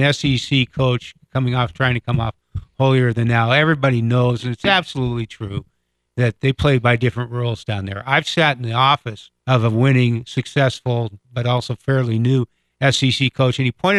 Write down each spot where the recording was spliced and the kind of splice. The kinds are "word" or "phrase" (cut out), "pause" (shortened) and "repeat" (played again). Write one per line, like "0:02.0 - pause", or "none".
0:09.4 - pause
0:11.2 - pause